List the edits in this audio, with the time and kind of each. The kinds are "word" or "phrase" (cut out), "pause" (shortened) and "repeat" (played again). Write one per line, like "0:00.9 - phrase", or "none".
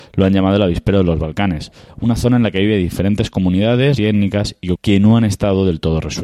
0:04.0 - word
0:04.8 - word